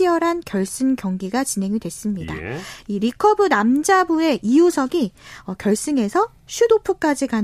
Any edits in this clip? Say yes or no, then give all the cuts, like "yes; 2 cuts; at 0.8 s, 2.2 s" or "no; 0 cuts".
no; 0 cuts